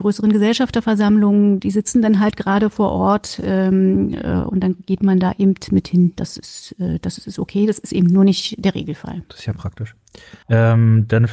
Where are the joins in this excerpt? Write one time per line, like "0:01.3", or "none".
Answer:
0:10.4